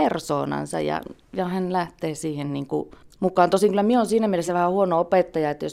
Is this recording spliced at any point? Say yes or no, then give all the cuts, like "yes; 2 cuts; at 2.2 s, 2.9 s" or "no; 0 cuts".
no; 0 cuts